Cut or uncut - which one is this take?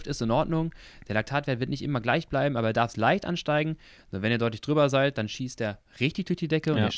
uncut